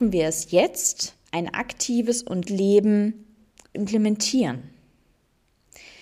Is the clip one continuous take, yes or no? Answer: no